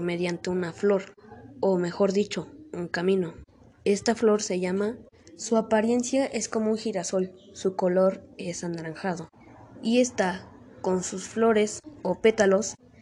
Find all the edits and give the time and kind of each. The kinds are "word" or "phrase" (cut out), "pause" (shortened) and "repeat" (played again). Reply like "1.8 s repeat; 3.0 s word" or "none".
none